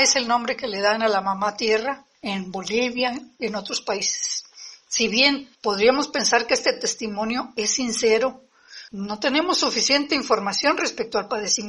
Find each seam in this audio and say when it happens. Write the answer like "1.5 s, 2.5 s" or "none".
2.1 s, 5.5 s, 8.9 s

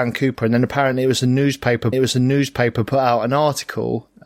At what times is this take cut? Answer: 1.9 s

